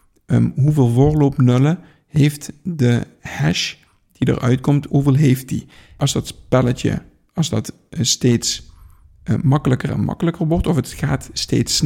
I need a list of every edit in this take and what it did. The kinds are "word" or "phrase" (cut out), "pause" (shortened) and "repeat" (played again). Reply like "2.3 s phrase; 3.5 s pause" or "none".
4.9 s word